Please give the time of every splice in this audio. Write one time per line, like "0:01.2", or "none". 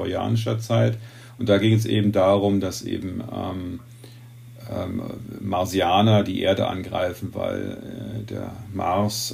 none